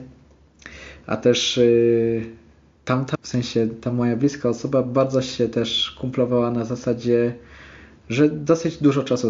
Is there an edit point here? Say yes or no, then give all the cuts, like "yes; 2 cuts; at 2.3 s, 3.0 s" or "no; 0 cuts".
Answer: yes; 1 cut; at 3.1 s